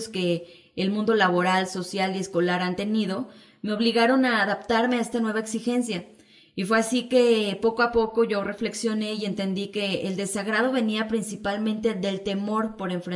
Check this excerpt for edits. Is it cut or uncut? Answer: uncut